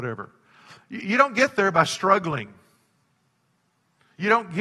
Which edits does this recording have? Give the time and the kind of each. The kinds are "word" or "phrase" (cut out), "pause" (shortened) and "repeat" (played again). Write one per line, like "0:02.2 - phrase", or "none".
none